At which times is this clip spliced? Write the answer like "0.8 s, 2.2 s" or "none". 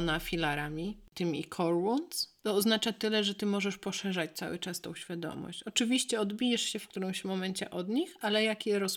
2.4 s